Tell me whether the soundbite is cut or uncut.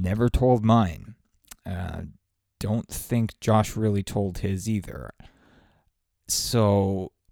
uncut